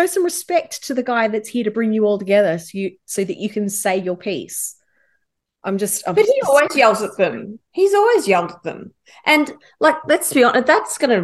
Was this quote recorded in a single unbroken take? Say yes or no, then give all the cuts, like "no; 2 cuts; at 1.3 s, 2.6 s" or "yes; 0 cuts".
yes; 0 cuts